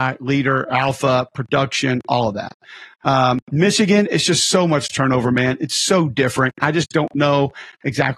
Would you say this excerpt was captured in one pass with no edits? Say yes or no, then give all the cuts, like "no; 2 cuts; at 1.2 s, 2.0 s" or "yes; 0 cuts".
yes; 0 cuts